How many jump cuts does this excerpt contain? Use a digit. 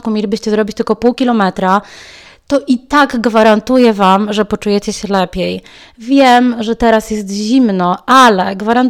0